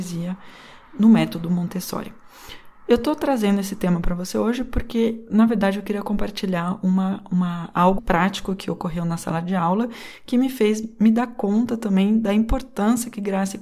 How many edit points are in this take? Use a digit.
1